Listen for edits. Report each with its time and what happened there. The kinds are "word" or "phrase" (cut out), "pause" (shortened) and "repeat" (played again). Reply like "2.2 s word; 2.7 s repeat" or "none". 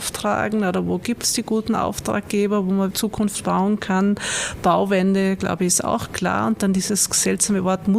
2.9 s word